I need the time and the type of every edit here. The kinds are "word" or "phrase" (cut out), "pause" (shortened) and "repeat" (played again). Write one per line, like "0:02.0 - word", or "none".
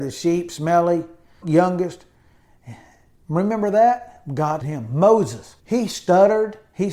0:01.4 - word
0:04.6 - word
0:05.6 - pause